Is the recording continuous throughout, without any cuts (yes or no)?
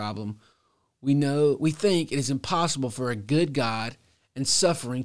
yes